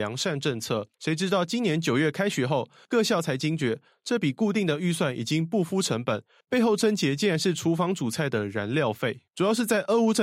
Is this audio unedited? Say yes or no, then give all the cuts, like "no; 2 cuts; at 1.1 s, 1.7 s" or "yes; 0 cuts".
no; 2 cuts; at 0.9 s, 9.3 s